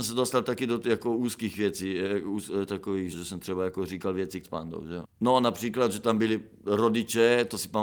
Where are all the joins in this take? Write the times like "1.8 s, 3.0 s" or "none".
3.1 s, 4.4 s, 5.1 s